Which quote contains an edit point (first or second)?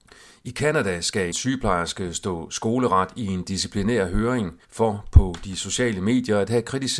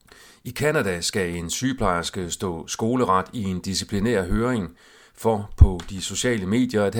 first